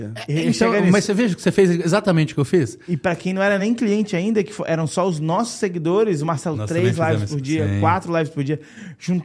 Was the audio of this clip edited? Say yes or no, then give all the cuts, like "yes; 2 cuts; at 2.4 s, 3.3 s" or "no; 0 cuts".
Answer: no; 0 cuts